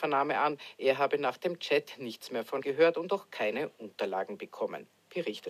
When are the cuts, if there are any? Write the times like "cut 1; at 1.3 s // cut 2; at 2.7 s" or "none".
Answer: cut 1; at 2.6 s